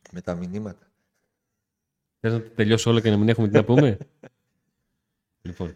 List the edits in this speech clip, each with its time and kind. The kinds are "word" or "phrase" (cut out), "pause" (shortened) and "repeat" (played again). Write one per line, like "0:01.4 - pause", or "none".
none